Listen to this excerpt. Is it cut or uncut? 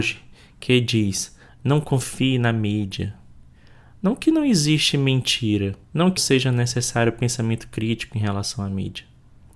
cut